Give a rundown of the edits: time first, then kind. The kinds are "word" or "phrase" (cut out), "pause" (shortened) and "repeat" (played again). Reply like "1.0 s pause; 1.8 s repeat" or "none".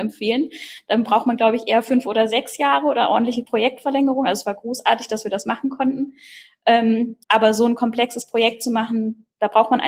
7.2 s pause